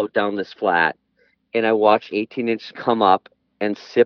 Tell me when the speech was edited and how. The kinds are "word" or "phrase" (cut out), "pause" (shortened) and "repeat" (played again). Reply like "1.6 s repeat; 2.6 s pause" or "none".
2.1 s word; 2.7 s word

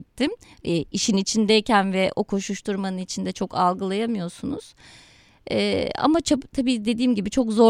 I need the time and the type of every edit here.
none

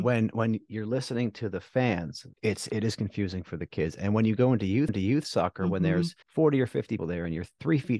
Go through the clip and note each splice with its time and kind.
2.3 s pause; 4.9 s repeat; 6.2 s pause; 7.0 s word

